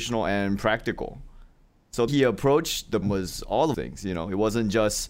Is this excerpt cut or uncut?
cut